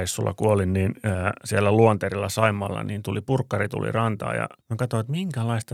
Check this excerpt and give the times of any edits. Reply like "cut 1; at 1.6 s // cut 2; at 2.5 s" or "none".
cut 1; at 4.6 s

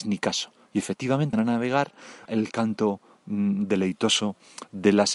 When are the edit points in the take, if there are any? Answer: cut 1; at 1.3 s // cut 2; at 2.3 s

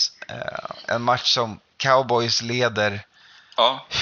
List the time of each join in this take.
cut 1; at 1.7 s

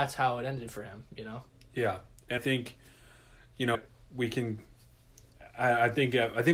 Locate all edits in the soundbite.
cut 1; at 2.4 s // cut 2; at 3.7 s

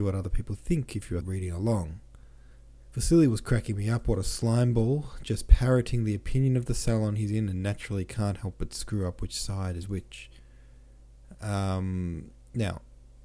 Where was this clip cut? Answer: cut 1; at 1.2 s // cut 2; at 2.5 s

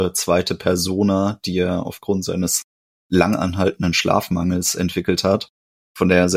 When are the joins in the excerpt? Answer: none

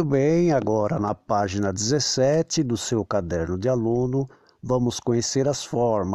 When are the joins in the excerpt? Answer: none

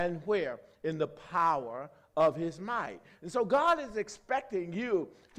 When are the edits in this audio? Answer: none

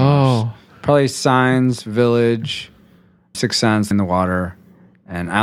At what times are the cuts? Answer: cut 1; at 3.3 s // cut 2; at 3.9 s

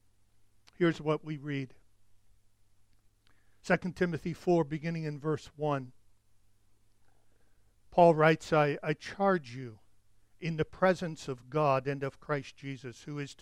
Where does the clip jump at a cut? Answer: none

